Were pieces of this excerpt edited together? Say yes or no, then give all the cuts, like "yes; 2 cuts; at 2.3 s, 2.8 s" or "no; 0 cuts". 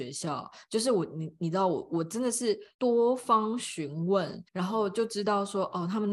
yes; 1 cut; at 4.5 s